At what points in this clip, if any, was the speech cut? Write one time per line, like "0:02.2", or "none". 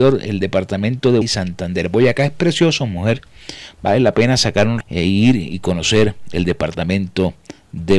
0:01.2
0:04.8